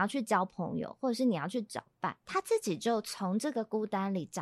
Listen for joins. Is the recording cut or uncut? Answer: cut